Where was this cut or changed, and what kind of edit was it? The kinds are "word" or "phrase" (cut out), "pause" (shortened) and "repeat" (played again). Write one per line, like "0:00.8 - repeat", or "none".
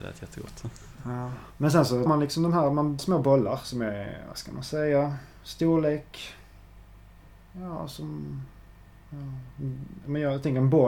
0:02.1 - word
0:03.0 - word